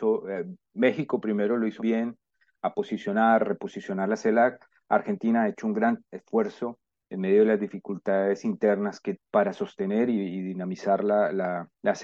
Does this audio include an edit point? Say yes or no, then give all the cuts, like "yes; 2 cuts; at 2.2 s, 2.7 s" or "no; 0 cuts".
yes; 2 cuts; at 1.8 s, 9.1 s